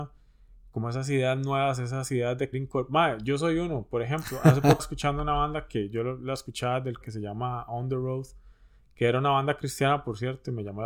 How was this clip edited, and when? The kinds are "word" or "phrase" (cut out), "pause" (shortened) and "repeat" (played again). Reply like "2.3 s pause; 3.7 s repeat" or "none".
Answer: 2.5 s word; 4.8 s word; 7.0 s word